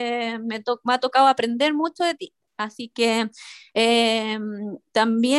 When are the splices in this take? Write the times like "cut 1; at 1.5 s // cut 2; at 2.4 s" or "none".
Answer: none